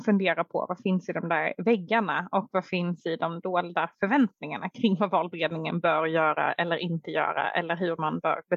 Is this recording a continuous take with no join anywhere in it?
yes; 0 cuts

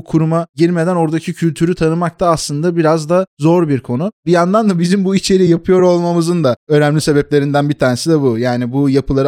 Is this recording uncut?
yes; 0 cuts

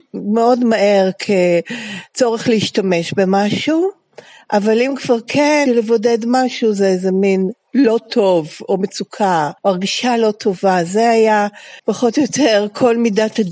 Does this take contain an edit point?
yes; 3 cuts; at 5.7 s, 9.6 s, 11.8 s

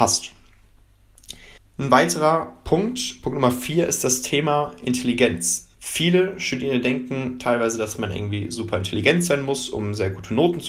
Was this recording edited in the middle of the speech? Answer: yes; 2 cuts; at 1.6 s, 5.7 s

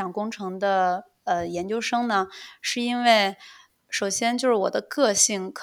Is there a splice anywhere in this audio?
no; 0 cuts

